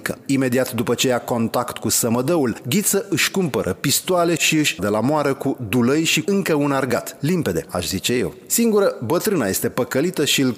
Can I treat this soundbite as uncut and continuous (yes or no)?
no